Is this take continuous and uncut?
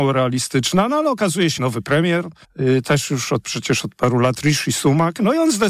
no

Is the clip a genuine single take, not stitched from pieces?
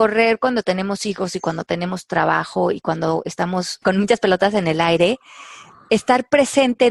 no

